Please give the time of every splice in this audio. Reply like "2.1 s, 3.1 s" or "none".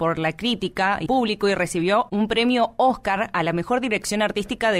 1.1 s